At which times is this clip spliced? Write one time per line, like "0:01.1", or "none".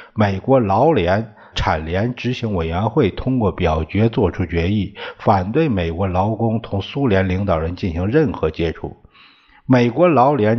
0:01.5